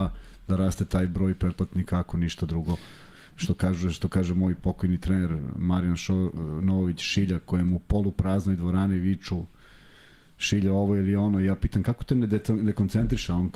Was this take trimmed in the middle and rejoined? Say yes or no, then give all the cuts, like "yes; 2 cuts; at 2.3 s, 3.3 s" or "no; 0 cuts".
no; 0 cuts